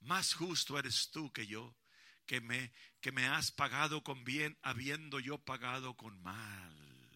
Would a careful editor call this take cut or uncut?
uncut